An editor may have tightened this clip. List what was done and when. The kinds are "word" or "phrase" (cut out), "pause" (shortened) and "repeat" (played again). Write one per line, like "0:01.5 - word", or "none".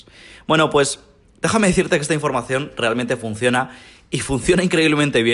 none